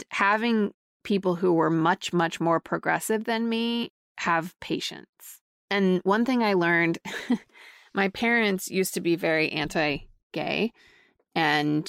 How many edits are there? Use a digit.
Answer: 0